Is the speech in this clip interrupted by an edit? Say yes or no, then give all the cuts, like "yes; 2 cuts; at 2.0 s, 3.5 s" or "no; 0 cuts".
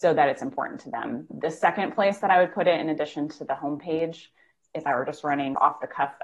no; 0 cuts